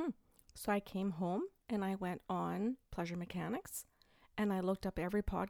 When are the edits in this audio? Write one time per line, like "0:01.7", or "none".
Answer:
none